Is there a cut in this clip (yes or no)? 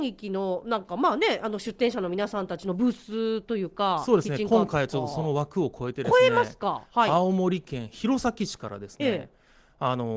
no